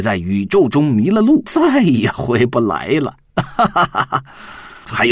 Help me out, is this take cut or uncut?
cut